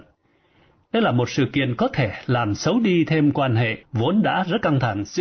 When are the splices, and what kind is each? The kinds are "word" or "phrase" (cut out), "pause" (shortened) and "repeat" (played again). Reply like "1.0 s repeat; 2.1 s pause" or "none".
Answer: none